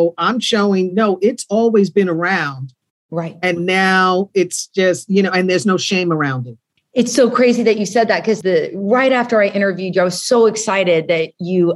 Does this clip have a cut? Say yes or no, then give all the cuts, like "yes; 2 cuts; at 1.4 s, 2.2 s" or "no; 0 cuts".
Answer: no; 0 cuts